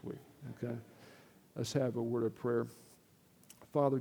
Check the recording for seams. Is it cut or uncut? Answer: uncut